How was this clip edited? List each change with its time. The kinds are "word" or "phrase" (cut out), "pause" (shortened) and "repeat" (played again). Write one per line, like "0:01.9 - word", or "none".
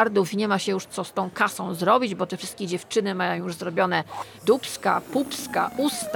none